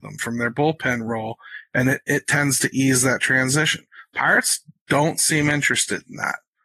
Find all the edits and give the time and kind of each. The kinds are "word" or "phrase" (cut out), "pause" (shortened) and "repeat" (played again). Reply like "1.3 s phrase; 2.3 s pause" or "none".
none